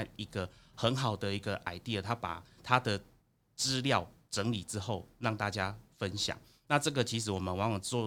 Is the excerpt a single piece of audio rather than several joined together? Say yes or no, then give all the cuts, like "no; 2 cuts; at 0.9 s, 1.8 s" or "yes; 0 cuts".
yes; 0 cuts